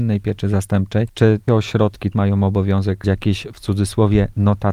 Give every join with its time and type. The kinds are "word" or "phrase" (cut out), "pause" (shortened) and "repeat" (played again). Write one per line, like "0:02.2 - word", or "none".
0:01.5 - word
0:02.1 - word
0:03.0 - word